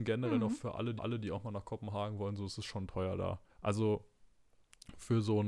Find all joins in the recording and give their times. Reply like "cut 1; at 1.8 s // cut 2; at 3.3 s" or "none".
cut 1; at 1.0 s // cut 2; at 3.5 s